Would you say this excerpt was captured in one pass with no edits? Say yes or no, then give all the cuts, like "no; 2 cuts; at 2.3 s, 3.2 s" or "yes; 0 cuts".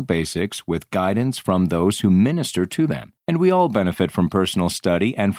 no; 1 cut; at 3.2 s